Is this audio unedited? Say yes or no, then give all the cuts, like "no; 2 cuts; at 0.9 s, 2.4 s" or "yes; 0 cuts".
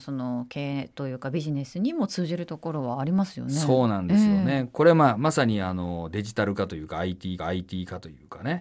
no; 1 cut; at 7.4 s